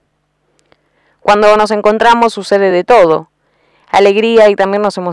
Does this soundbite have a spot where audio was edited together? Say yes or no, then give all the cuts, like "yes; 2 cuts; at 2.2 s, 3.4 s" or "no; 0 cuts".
no; 0 cuts